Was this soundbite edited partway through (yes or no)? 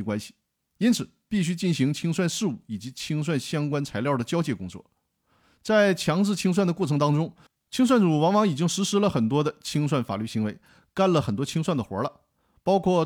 no